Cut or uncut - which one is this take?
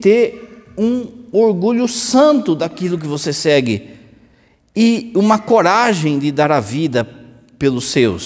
uncut